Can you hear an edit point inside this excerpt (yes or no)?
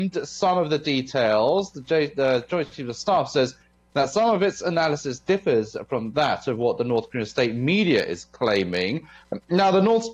no